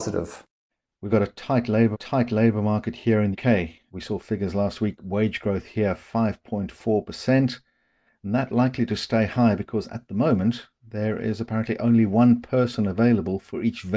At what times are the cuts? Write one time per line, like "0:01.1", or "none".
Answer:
0:01.1
0:01.9
0:03.3